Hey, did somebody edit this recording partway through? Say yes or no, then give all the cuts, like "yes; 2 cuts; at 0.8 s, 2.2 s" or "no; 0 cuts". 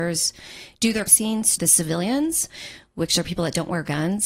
yes; 2 cuts; at 1.1 s, 1.6 s